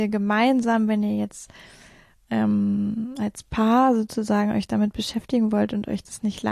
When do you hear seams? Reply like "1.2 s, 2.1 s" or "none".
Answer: none